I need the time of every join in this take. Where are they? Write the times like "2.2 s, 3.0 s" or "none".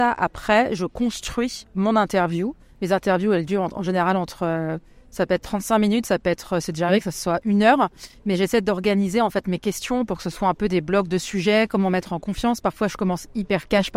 none